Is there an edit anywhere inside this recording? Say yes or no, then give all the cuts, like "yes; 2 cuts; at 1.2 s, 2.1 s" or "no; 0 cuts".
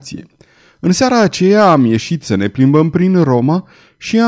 no; 0 cuts